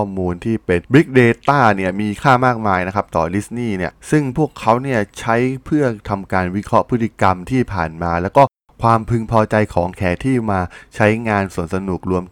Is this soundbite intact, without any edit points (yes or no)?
yes